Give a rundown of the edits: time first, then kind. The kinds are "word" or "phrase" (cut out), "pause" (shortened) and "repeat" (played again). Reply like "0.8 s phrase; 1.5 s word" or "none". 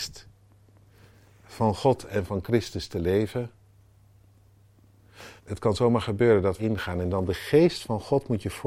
5.4 s pause; 6.6 s phrase

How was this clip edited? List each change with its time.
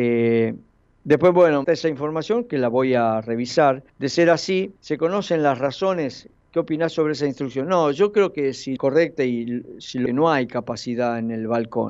1.6 s phrase; 3.9 s pause; 4.8 s pause; 8.8 s phrase; 10.1 s phrase

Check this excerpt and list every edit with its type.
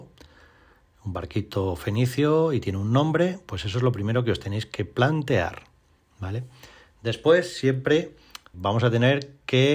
8.5 s word

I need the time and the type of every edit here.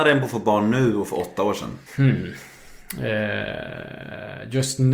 1.9 s pause

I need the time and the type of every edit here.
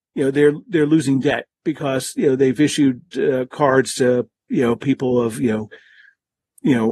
none

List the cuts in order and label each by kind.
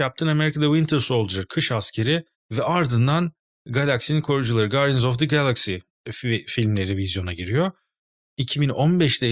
2.3 s pause

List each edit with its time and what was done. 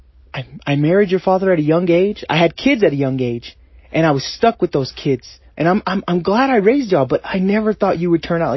none

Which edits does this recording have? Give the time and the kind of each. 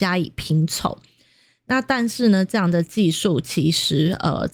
none

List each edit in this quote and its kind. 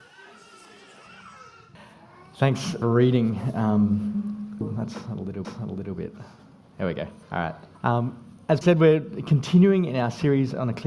2.8 s phrase; 4.6 s word; 5.4 s repeat; 7.2 s pause; 7.7 s pause; 8.6 s word

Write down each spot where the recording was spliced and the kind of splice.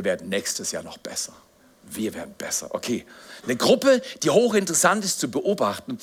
none

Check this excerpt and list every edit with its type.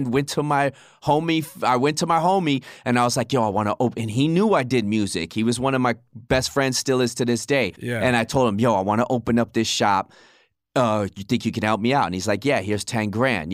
none

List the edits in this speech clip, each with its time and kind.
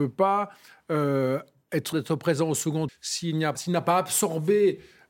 1.9 s word; 2.9 s word; 3.5 s word

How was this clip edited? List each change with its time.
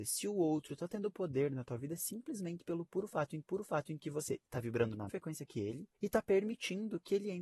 3.4 s repeat; 5.1 s word; 5.9 s pause

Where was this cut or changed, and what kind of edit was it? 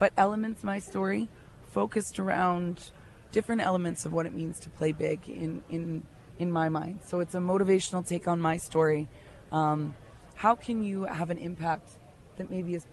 none

